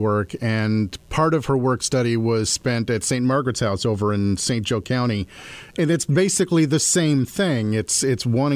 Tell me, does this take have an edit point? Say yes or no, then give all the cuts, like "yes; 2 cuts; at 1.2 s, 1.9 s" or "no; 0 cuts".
no; 0 cuts